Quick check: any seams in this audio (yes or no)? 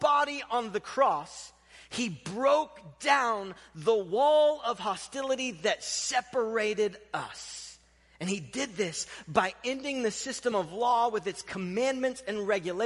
no